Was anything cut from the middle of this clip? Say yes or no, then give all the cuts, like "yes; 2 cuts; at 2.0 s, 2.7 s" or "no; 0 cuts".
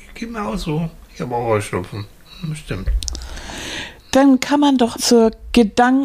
yes; 1 cut; at 5.0 s